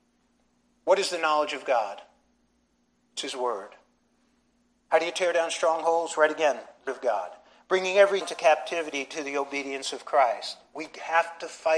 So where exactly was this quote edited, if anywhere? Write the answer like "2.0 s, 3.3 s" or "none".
6.9 s, 8.2 s